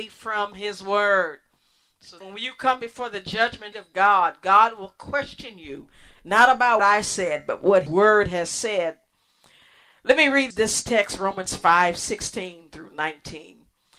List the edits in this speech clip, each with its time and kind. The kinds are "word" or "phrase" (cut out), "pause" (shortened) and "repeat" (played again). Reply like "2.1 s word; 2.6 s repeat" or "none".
2.2 s word; 3.7 s word; 6.8 s word; 7.9 s word; 10.5 s word